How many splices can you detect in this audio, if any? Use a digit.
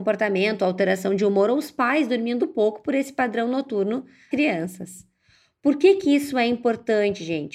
2